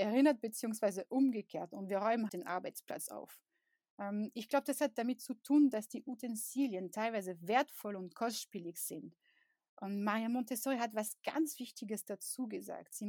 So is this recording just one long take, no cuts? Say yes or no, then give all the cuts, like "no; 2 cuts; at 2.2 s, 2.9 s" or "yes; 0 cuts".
no; 1 cut; at 2.3 s